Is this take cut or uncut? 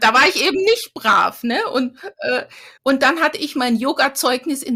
cut